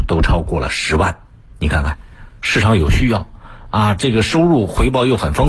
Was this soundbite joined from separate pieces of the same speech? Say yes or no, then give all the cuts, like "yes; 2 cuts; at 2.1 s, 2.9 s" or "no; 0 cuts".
no; 0 cuts